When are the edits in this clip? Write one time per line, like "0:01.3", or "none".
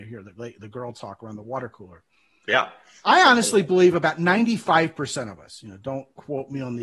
none

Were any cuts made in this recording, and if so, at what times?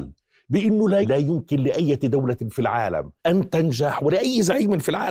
0:01.0
0:03.2

